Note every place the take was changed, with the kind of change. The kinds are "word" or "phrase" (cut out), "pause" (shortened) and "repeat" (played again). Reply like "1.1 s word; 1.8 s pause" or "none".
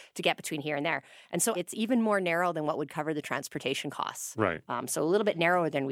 1.5 s word